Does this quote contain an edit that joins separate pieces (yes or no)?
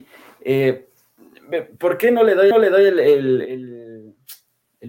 yes